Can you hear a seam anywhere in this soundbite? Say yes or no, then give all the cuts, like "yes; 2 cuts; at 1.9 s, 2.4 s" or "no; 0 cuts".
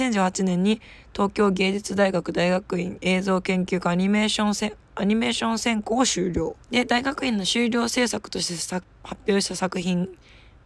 yes; 1 cut; at 6.6 s